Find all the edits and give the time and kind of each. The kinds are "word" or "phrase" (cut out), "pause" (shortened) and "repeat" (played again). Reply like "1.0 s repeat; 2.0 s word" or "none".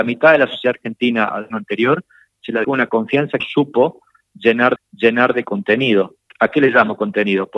1.5 s word; 2.6 s word; 3.4 s phrase; 4.8 s repeat; 6.3 s pause